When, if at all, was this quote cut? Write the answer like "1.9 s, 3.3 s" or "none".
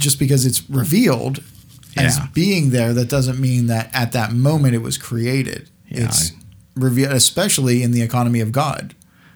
none